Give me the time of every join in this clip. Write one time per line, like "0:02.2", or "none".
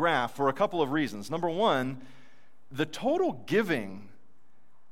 0:02.7